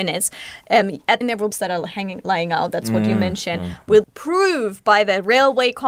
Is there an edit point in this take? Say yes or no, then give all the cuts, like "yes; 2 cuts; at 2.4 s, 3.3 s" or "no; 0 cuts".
yes; 3 cuts; at 1.2 s, 1.5 s, 4.0 s